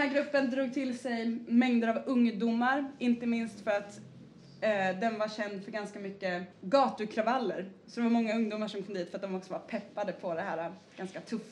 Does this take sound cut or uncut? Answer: cut